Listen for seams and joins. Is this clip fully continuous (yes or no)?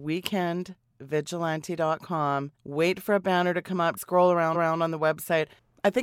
no